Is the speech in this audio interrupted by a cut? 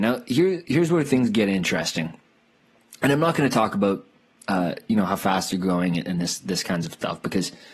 no; 0 cuts

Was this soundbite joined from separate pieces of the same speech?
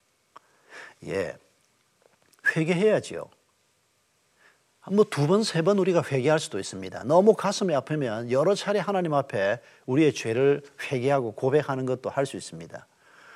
no; 0 cuts

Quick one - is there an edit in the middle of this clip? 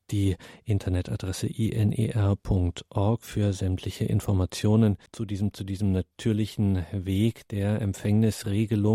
yes; 2 cuts; at 5.1 s, 5.5 s

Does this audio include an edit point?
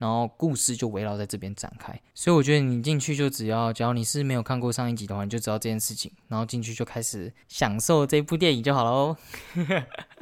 yes; 1 cut; at 7.4 s

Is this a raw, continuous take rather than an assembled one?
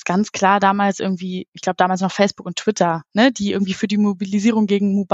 yes; 0 cuts

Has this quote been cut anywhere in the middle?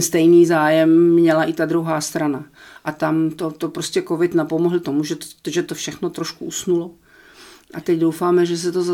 no; 0 cuts

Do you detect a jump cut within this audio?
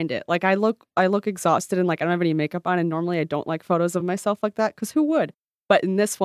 no; 0 cuts

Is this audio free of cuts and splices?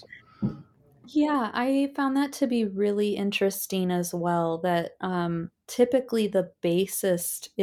yes; 0 cuts

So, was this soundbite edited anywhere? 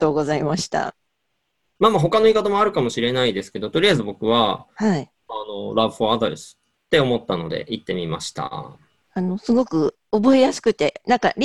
no; 0 cuts

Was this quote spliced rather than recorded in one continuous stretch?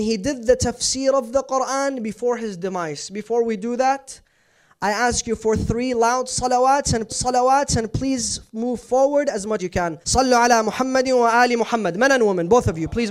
yes; 3 cuts; at 7.1 s, 9.6 s, 10.0 s

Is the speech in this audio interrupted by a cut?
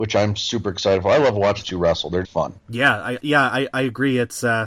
yes; 4 cuts; at 1.6 s, 2.2 s, 2.6 s, 3.2 s

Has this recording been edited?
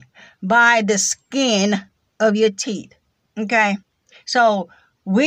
yes; 2 cuts; at 2.0 s, 3.1 s

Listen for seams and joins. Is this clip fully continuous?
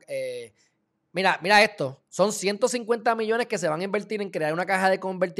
no; 1 cut; at 2.0 s

